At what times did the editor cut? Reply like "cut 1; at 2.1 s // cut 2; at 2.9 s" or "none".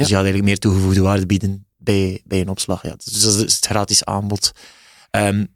cut 1; at 1.7 s

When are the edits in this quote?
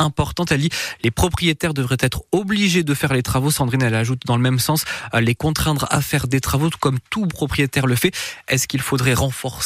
cut 1; at 7.3 s

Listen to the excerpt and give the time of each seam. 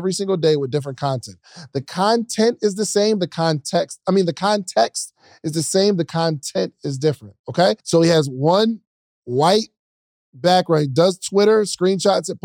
cut 1; at 7.8 s

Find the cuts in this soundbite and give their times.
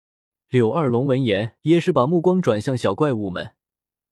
cut 1; at 1.6 s

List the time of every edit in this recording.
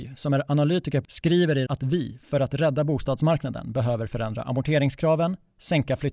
cut 1; at 1.0 s // cut 2; at 1.7 s

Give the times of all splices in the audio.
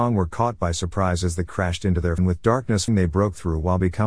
cut 1; at 1.5 s // cut 2; at 2.2 s // cut 3; at 2.9 s

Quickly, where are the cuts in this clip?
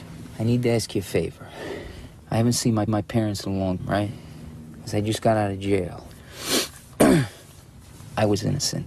cut 1; at 2.9 s // cut 2; at 3.8 s

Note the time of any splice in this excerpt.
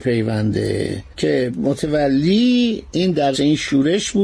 cut 1; at 1.5 s // cut 2; at 3.3 s

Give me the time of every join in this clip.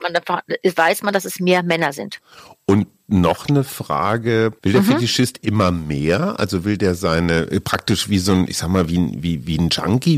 none

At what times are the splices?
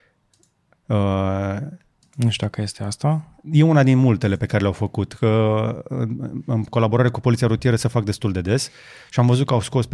none

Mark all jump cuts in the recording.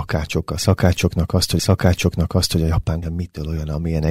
cut 1; at 1.6 s // cut 2; at 3.0 s

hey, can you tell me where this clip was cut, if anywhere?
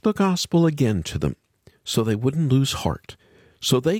none

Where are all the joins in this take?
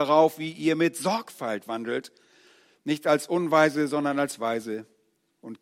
none

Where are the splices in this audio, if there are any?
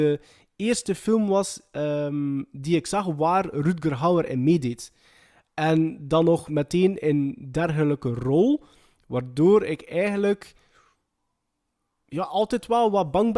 none

